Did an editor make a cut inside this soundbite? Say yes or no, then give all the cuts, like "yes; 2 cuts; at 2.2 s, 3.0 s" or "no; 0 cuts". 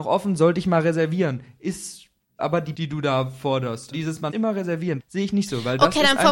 yes; 5 cuts; at 2.4 s, 2.7 s, 3.9 s, 4.3 s, 5.0 s